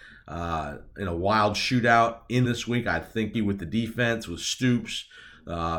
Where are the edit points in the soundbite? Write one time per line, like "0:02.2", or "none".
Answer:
0:02.4
0:03.3